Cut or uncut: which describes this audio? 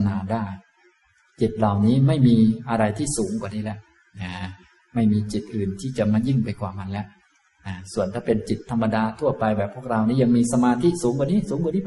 uncut